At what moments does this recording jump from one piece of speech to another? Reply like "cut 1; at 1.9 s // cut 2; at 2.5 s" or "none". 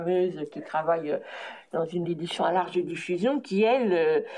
cut 1; at 2.0 s